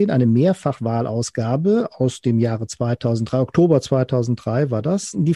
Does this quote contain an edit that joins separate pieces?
no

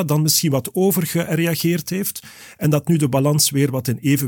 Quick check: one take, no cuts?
yes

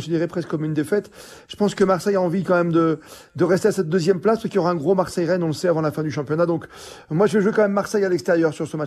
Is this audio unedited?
yes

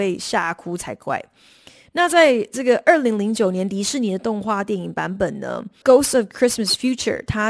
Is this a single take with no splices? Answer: yes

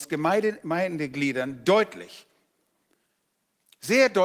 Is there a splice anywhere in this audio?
no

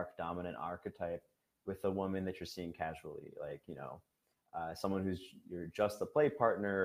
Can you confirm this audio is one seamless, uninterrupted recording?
yes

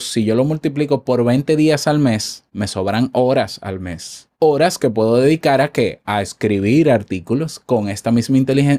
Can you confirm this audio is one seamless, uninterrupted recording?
no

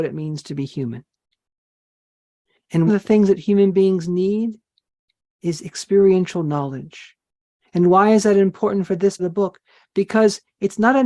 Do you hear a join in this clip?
yes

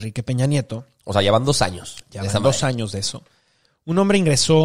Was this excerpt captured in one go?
yes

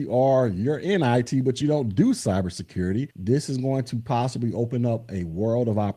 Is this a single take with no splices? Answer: yes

